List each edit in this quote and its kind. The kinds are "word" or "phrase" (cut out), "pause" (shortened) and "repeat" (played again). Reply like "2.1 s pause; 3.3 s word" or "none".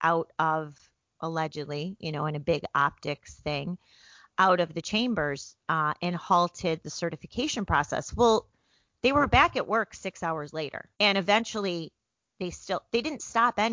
10.9 s pause